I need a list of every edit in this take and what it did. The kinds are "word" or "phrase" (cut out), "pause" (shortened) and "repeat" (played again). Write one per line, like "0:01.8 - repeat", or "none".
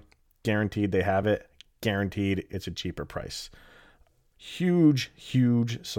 none